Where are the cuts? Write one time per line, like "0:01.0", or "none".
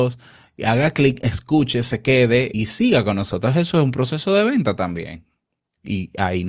0:02.5